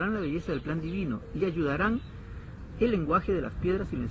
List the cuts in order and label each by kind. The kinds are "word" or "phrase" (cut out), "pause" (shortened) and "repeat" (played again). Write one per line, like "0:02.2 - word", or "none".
none